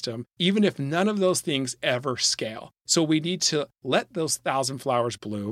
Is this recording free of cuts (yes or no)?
yes